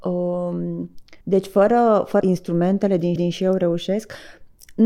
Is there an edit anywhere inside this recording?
yes; 3 cuts; at 1.2 s, 2.2 s, 3.2 s

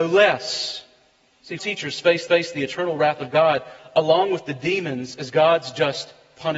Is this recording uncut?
no; 2 cuts; at 1.6 s, 2.3 s

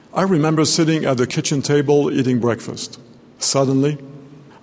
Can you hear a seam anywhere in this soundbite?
no; 0 cuts

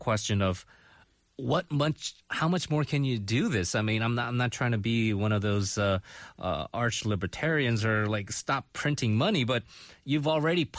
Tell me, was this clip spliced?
no; 0 cuts

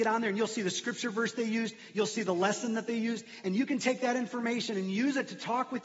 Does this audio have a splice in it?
no; 0 cuts

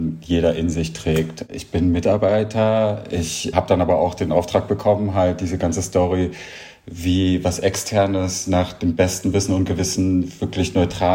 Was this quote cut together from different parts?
no; 0 cuts

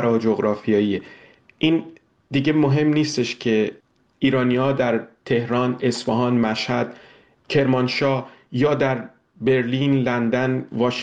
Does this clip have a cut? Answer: no; 0 cuts

